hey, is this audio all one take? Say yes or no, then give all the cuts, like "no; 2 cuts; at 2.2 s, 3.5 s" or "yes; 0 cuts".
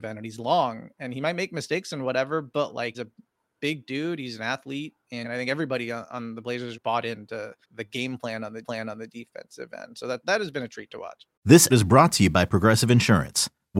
no; 7 cuts; at 2.9 s, 5.2 s, 6.7 s, 7.6 s, 8.6 s, 10.2 s, 11.7 s